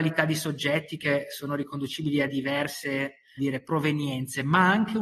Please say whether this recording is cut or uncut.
cut